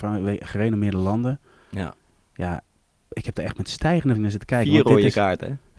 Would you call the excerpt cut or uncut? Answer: cut